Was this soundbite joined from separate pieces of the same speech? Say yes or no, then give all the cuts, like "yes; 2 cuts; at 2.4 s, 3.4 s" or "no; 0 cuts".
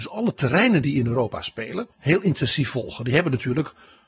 yes; 1 cut; at 1.9 s